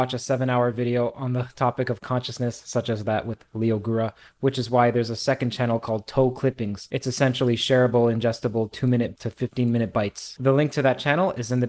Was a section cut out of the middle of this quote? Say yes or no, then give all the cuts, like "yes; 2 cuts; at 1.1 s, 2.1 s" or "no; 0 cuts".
no; 0 cuts